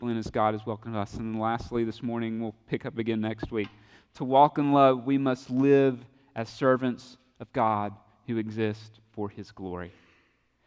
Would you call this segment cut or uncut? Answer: uncut